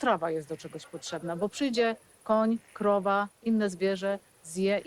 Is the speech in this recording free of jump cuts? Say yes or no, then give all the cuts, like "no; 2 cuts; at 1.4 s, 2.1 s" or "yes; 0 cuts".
yes; 0 cuts